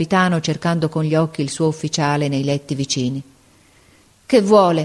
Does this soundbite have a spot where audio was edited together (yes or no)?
no